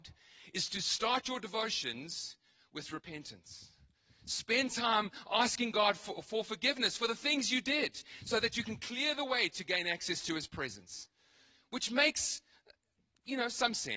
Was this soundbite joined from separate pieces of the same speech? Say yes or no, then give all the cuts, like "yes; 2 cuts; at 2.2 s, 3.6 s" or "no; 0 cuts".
no; 0 cuts